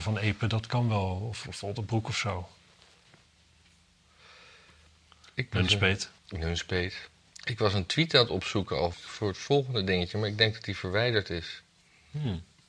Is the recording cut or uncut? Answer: cut